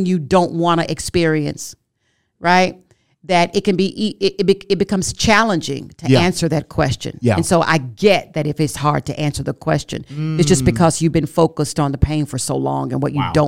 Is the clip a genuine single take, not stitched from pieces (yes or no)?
yes